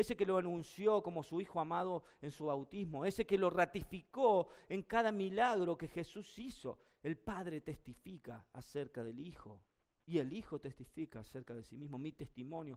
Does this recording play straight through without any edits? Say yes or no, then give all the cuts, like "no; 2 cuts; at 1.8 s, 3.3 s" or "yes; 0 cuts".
yes; 0 cuts